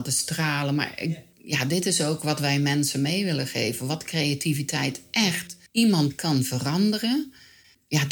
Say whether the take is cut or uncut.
cut